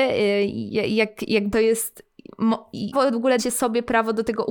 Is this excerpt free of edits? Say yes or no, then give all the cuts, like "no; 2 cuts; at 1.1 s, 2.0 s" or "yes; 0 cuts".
no; 3 cuts; at 1.5 s, 2.9 s, 3.4 s